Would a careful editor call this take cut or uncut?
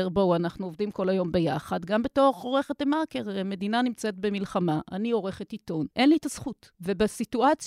cut